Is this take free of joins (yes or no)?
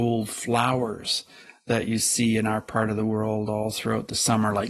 yes